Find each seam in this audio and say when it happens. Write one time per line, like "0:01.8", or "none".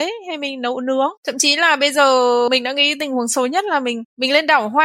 0:01.2

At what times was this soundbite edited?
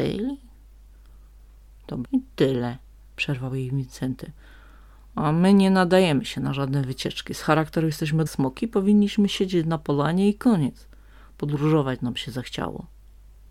0:02.0
0:08.3

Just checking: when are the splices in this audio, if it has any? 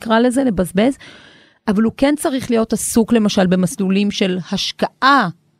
none

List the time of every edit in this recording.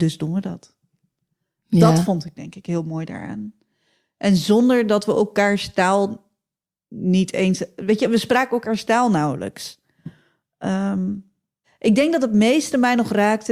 none

